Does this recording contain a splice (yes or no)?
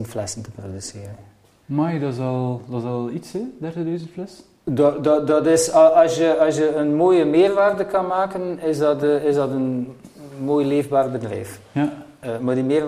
no